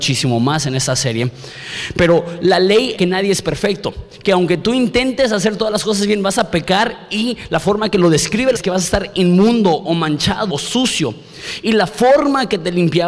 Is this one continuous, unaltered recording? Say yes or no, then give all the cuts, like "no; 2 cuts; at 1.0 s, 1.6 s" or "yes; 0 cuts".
no; 3 cuts; at 3.0 s, 8.5 s, 10.5 s